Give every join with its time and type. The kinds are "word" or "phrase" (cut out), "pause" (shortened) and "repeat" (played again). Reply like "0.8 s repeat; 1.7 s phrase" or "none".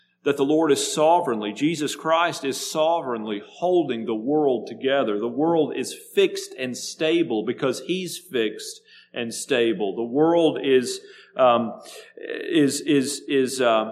none